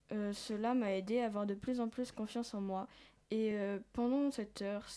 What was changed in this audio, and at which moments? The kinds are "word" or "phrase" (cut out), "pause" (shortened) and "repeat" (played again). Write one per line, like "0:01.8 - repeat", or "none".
none